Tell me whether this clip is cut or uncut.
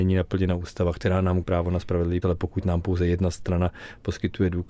cut